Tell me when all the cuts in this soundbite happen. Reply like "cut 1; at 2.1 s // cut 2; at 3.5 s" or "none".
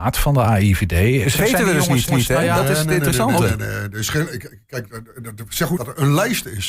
cut 1; at 1.3 s // cut 2; at 2.1 s // cut 3; at 5.8 s